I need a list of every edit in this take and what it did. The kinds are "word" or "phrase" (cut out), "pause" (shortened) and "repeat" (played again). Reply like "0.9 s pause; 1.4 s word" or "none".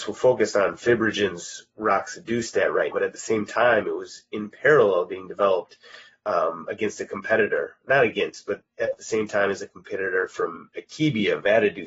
2.9 s word

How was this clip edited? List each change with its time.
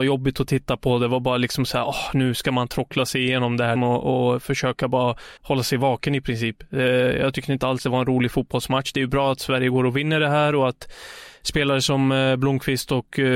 3.8 s word; 5.4 s pause

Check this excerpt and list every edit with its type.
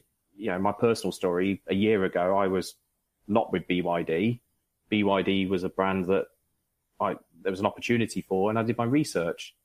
none

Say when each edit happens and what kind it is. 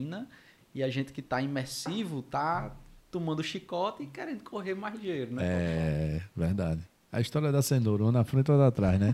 3.0 s pause

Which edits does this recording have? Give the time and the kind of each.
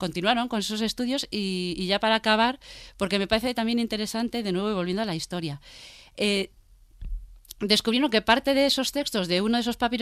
none

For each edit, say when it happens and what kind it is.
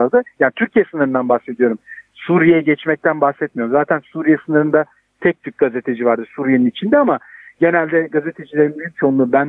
none

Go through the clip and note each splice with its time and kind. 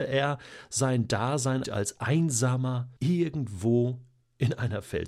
1.6 s phrase; 3.0 s pause

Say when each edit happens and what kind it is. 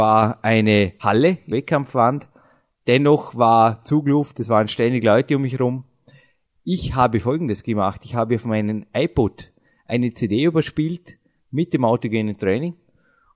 1.5 s phrase

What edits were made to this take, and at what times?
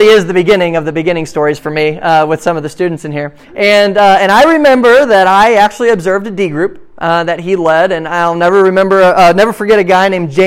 3.4 s pause

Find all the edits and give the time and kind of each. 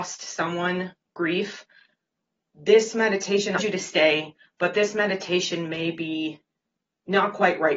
3.6 s phrase

